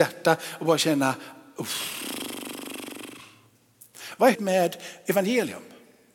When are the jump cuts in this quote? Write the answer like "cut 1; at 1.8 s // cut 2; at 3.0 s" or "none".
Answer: cut 1; at 4.3 s